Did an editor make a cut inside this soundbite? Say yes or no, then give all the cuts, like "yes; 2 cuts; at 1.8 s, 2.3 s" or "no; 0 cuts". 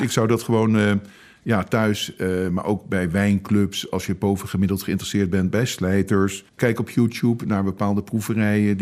yes; 1 cut; at 6.5 s